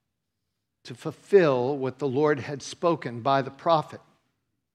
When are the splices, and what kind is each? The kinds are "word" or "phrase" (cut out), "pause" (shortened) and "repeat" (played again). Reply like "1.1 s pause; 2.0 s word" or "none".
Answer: none